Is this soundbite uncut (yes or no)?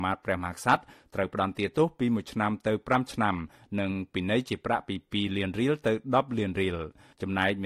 yes